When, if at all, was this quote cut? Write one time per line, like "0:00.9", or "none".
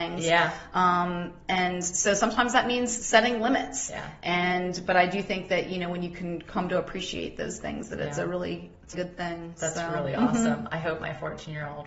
0:08.9